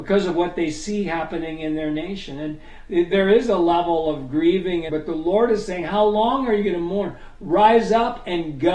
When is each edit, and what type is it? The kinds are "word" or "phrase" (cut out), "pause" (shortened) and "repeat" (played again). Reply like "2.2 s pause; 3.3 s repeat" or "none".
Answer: 4.9 s word

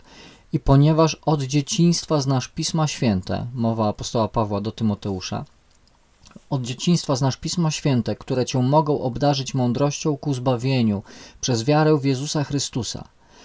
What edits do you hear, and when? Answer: none

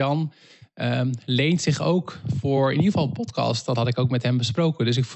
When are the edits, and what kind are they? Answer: none

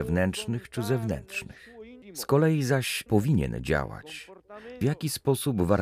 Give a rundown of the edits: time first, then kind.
2.0 s pause; 3.1 s word; 4.8 s phrase

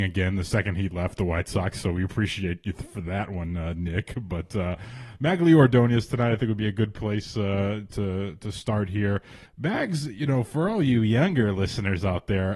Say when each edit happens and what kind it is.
9.5 s pause

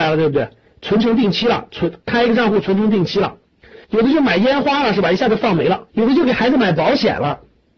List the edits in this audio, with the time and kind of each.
3.8 s pause; 5.9 s pause

